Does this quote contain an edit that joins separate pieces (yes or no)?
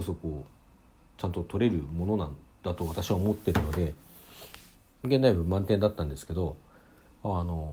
no